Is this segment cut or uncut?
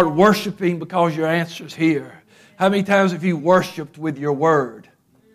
uncut